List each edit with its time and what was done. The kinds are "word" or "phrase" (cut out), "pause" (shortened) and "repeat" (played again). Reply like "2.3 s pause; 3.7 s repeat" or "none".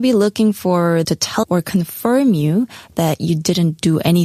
1.0 s word; 1.4 s word